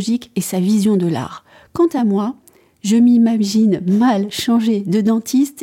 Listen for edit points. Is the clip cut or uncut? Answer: uncut